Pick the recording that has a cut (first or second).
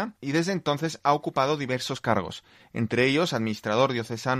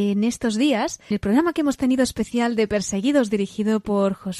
second